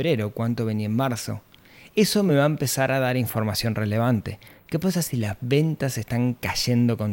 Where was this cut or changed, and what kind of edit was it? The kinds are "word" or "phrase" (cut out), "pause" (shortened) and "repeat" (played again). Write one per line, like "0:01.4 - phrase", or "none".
none